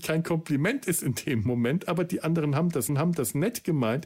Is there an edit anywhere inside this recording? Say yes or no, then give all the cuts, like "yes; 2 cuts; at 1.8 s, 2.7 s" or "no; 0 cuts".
yes; 1 cut; at 2.9 s